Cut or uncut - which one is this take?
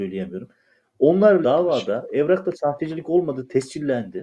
cut